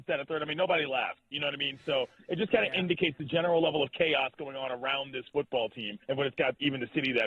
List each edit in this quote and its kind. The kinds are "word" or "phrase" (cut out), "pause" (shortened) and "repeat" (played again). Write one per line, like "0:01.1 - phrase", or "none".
0:06.0 - pause